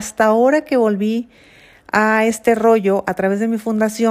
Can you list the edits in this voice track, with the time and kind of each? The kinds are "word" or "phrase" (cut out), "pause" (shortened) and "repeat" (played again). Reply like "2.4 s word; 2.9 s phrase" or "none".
none